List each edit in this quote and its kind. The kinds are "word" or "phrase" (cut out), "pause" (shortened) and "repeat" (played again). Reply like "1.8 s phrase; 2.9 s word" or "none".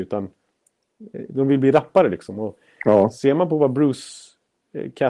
none

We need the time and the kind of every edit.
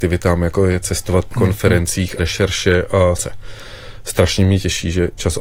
1.3 s word; 2.2 s phrase; 3.2 s word

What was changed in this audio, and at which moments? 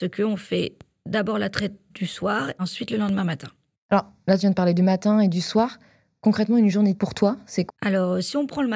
2.6 s word; 7.0 s word; 7.7 s word

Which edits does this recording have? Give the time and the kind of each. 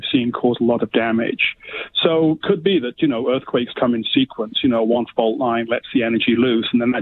2.4 s word; 3.7 s word

